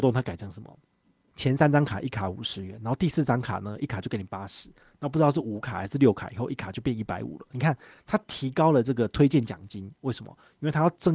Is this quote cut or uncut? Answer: uncut